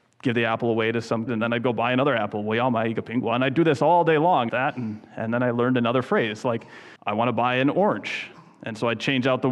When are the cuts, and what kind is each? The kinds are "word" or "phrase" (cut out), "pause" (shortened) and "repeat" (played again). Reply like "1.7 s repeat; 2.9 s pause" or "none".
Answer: 1.3 s word; 4.5 s phrase; 7.0 s pause

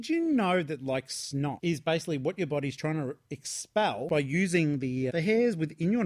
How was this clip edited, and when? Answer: 5.1 s word

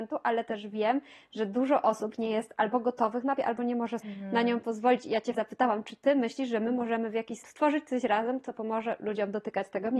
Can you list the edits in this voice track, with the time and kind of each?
3.4 s word; 4.0 s word; 5.3 s word; 7.4 s word

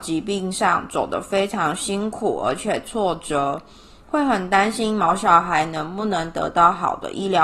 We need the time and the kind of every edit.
none

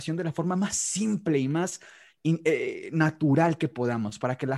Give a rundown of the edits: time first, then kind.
none

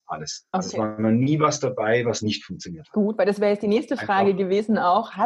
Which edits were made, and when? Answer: none

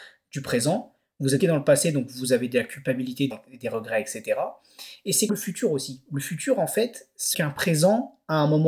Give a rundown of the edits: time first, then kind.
1.4 s word; 3.3 s word; 5.3 s word; 7.3 s word

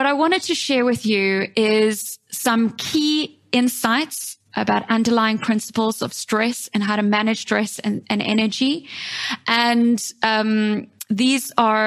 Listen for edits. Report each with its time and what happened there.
none

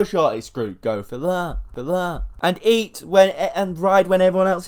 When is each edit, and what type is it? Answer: 1.8 s repeat

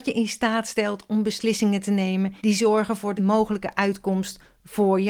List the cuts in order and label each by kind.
2.4 s pause; 3.2 s phrase

